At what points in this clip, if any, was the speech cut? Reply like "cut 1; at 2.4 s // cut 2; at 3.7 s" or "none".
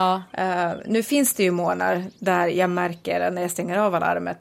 none